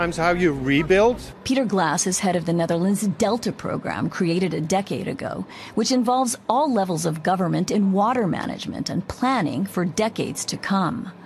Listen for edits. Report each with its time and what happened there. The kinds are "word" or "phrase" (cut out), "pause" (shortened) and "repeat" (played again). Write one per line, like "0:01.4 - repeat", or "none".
none

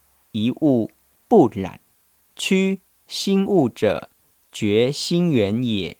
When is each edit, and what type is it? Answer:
0:01.9 - pause

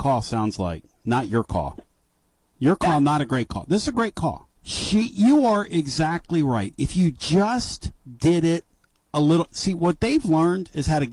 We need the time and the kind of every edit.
0:04.6 - pause

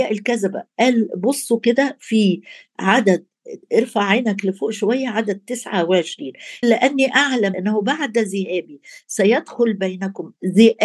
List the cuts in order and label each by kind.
0:03.6 - pause
0:06.6 - word
0:07.5 - word

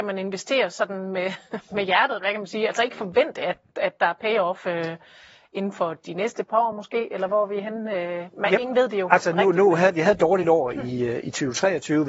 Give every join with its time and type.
none

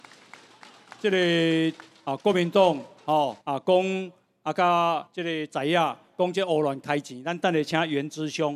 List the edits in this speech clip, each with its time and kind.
0:03.4 - pause
0:05.1 - pause

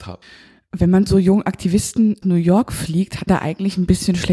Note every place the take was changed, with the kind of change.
0:01.1 - word
0:02.2 - word
0:03.3 - word

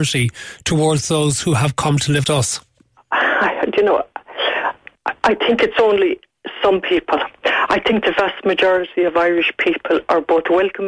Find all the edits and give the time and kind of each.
0:02.2 - word

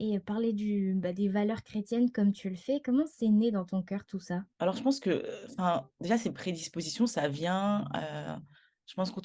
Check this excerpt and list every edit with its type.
0:04.5 - pause

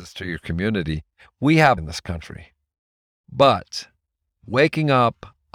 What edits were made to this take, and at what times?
0:01.8 - word

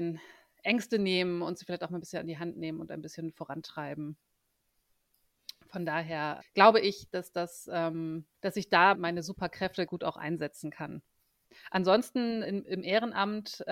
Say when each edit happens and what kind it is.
0:06.4 - word
0:08.3 - pause
0:08.9 - word
0:09.9 - word
0:12.4 - word

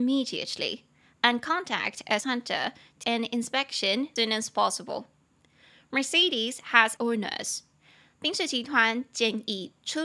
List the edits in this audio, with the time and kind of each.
0:02.2 - word
0:03.0 - word
0:04.2 - word
0:07.0 - word

